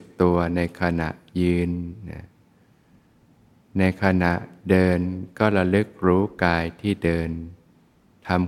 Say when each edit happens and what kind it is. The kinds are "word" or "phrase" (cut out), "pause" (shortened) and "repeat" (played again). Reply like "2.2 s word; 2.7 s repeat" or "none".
none